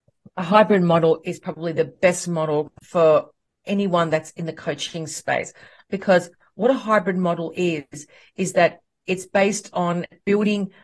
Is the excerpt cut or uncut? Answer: uncut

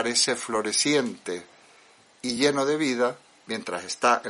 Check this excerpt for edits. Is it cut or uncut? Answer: uncut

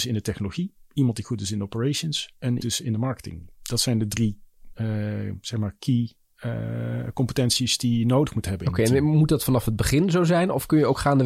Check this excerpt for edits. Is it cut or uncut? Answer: cut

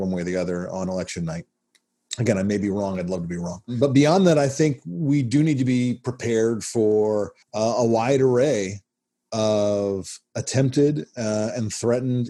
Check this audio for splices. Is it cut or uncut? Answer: cut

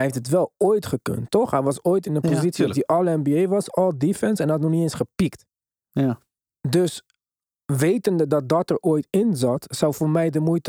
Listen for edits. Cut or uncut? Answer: uncut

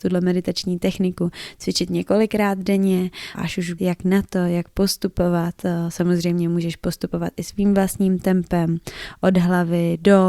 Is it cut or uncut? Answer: cut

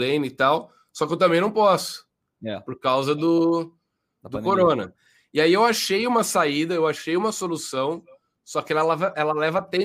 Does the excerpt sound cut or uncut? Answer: uncut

